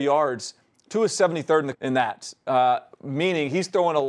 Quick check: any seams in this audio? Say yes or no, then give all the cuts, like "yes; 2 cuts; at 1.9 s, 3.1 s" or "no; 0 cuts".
yes; 1 cut; at 1.7 s